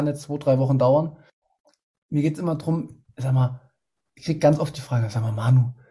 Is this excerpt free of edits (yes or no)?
yes